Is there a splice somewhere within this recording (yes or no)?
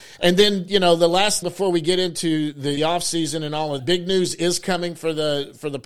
yes